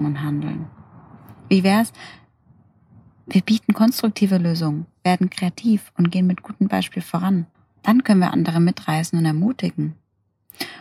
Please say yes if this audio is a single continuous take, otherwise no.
no